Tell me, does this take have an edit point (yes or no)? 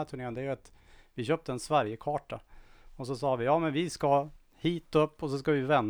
no